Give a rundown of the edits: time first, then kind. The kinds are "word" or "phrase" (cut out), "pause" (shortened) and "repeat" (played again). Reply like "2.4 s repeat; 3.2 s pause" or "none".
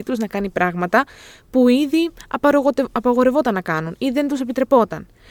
none